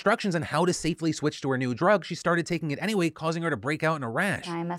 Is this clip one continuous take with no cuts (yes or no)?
yes